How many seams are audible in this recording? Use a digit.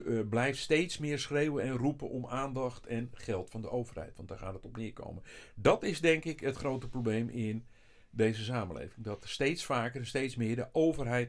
0